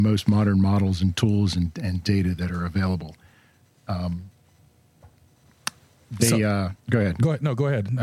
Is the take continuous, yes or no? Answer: no